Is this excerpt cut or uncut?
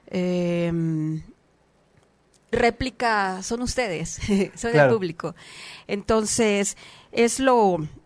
cut